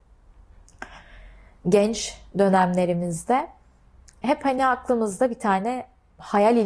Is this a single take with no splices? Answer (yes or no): yes